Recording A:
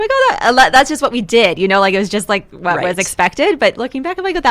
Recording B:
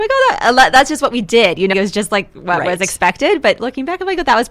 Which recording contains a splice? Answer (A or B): B